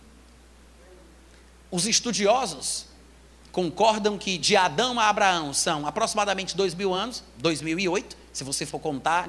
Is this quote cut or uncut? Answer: uncut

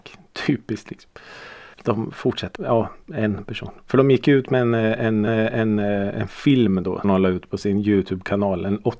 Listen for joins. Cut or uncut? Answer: cut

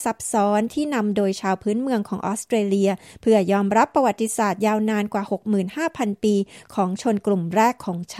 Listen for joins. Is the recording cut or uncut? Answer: uncut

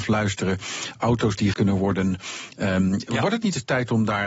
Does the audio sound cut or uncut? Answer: cut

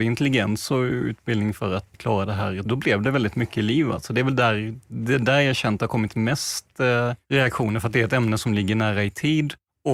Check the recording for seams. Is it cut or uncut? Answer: cut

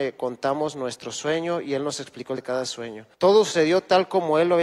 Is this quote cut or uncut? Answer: cut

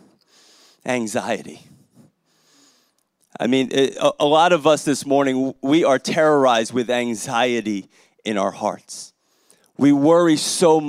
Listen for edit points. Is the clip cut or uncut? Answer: uncut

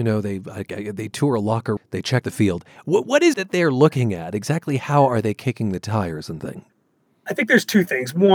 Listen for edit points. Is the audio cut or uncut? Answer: cut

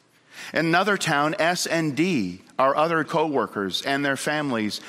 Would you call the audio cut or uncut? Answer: cut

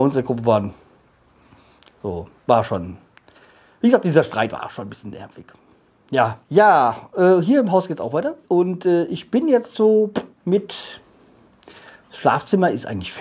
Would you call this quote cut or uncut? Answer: cut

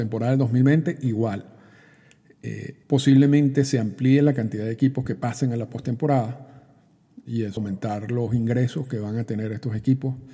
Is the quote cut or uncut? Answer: cut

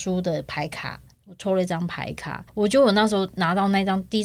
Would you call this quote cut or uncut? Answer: cut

